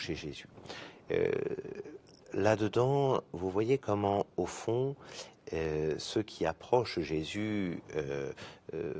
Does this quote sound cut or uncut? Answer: uncut